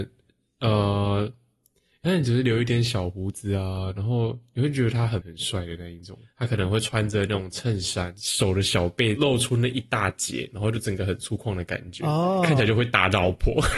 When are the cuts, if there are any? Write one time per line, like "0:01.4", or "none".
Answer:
0:05.2